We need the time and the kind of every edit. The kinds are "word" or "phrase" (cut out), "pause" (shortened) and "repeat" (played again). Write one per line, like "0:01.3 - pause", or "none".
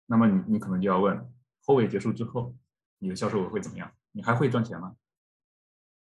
0:01.5 - pause